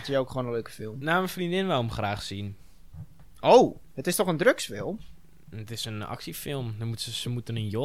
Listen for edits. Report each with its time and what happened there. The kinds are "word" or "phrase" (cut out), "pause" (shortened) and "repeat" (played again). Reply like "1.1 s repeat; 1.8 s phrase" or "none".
none